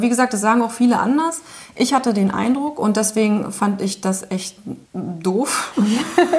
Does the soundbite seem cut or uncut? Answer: cut